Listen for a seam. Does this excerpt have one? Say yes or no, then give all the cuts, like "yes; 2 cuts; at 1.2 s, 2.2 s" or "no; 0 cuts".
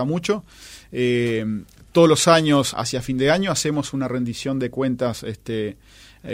yes; 1 cut; at 2.7 s